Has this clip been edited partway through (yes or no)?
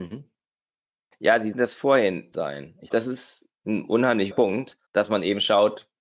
yes